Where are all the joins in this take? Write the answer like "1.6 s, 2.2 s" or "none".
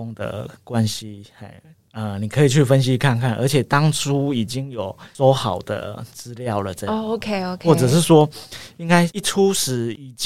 none